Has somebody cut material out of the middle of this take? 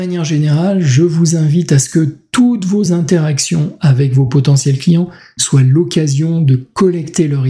no; 0 cuts

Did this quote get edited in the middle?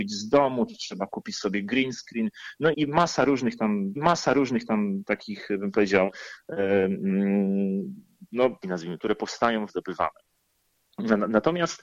yes; 5 cuts; at 2.7 s, 4.0 s, 8.6 s, 9.0 s, 9.7 s

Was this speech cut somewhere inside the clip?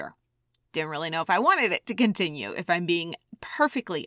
no; 0 cuts

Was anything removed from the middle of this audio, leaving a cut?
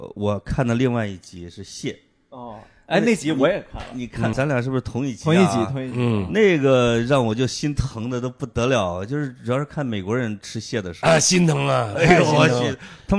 yes; 1 cut; at 4.3 s

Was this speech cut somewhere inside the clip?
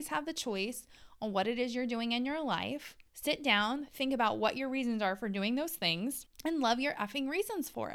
yes; 1 cut; at 3.1 s

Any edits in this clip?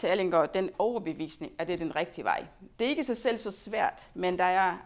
yes; 1 cut; at 2.7 s

